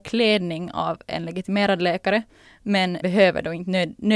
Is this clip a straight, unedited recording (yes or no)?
no